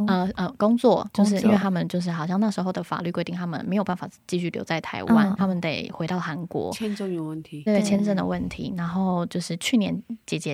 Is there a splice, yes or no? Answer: yes